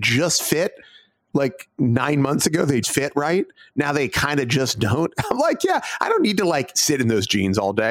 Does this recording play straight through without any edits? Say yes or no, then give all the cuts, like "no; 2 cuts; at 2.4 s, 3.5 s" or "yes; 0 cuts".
no; 1 cut; at 2.8 s